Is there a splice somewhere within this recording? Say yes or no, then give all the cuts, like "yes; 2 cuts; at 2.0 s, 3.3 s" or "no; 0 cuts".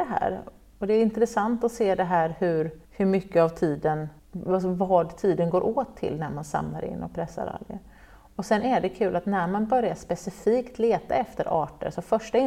yes; 2 cuts; at 2.8 s, 4.2 s